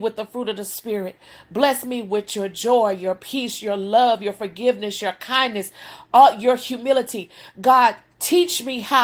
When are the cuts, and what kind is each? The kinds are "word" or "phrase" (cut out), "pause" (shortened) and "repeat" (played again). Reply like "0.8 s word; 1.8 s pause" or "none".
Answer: none